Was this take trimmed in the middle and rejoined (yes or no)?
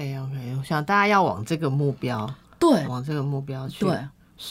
yes